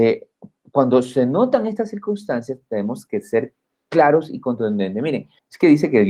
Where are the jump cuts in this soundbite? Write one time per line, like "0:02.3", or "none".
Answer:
none